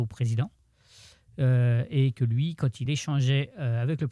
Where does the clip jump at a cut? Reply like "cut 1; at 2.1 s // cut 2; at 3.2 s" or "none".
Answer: none